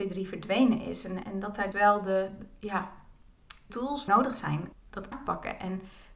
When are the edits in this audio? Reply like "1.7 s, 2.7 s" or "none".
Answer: 1.2 s, 1.7 s, 3.7 s, 4.1 s, 4.7 s, 5.1 s